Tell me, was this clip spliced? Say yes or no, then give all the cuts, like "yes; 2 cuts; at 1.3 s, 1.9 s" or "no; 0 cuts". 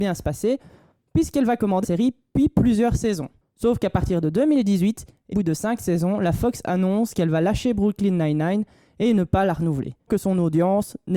yes; 3 cuts; at 1.8 s, 5.3 s, 10.1 s